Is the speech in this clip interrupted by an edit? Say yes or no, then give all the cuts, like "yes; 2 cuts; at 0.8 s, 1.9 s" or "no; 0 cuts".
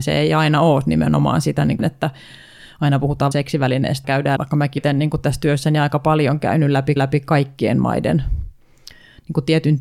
yes; 6 cuts; at 1.8 s, 3.3 s, 4.0 s, 4.4 s, 4.8 s, 7.0 s